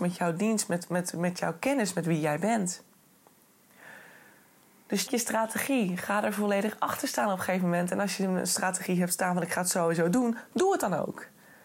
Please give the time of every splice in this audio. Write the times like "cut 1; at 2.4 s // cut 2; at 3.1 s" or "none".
cut 1; at 5.1 s